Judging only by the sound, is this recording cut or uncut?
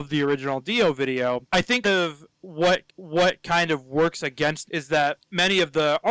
cut